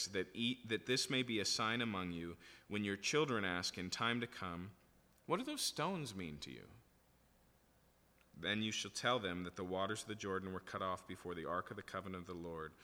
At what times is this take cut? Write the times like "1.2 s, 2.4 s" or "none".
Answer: none

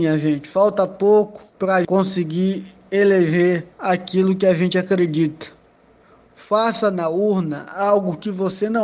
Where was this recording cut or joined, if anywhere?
1.5 s, 1.8 s, 3.7 s

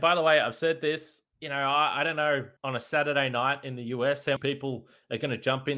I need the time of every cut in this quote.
1.3 s, 2.6 s, 4.4 s

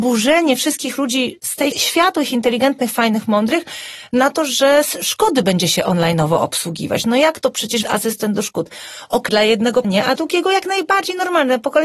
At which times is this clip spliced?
1.7 s, 7.8 s, 9.3 s, 9.8 s, 10.2 s

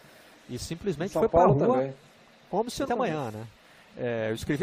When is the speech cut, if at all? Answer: 2.9 s

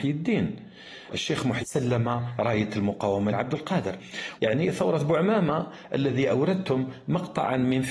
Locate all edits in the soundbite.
1.1 s, 1.6 s, 3.3 s, 4.4 s

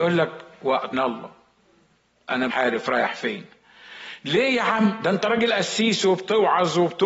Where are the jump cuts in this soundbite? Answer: 0.9 s, 2.5 s

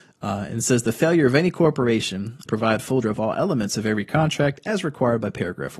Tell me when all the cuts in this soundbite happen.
2.5 s, 3.0 s

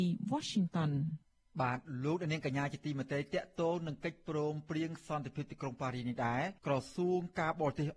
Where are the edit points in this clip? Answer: 6.6 s

